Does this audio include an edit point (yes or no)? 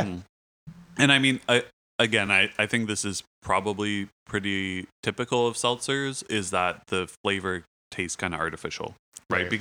no